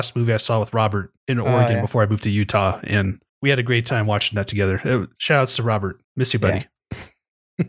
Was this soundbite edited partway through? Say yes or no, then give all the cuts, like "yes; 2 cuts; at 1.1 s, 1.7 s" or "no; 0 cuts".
yes; 3 cuts; at 1.2 s, 3.3 s, 6.0 s